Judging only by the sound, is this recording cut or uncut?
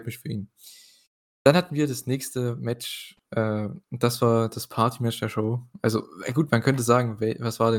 cut